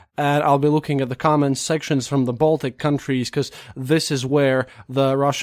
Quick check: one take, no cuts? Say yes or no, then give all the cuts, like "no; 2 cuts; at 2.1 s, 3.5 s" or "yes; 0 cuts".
yes; 0 cuts